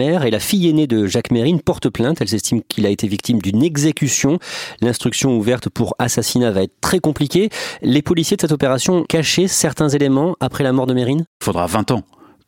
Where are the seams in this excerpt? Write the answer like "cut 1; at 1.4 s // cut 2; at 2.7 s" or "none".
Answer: cut 1; at 9.0 s